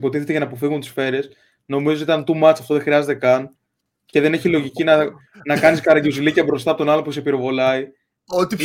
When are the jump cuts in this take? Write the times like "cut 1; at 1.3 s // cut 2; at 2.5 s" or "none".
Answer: none

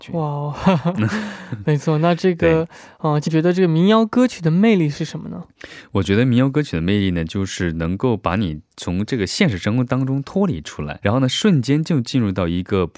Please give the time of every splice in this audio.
cut 1; at 3.3 s // cut 2; at 11.0 s

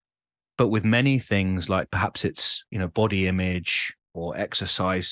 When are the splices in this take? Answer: none

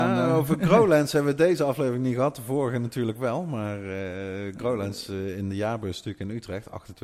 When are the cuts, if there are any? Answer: none

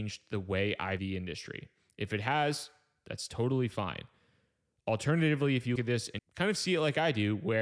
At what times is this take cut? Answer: cut 1; at 1.0 s // cut 2; at 5.8 s // cut 3; at 6.2 s

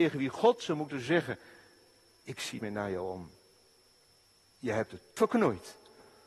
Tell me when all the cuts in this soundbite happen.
cut 1; at 2.6 s // cut 2; at 5.2 s

